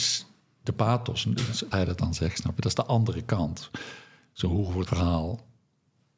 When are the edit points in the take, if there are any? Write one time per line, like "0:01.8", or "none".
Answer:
0:01.7
0:04.9